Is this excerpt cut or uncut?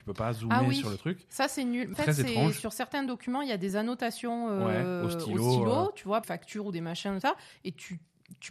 cut